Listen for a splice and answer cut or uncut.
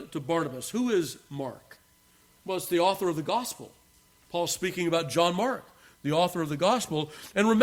uncut